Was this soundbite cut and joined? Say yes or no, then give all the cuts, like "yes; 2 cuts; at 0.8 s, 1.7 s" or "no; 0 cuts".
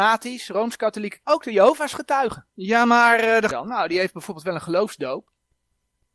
yes; 3 cuts; at 1.2 s, 2.5 s, 3.5 s